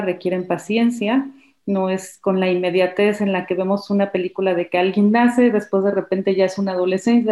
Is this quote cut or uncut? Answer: uncut